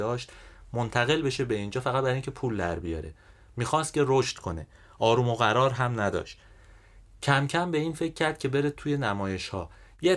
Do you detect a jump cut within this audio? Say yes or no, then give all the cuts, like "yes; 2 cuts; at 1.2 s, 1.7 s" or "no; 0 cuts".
no; 0 cuts